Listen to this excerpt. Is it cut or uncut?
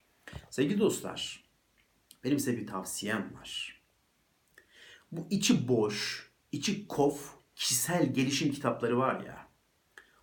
uncut